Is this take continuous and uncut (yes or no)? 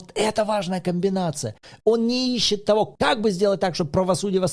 yes